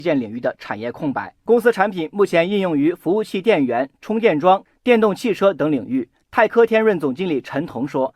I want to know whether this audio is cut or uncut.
uncut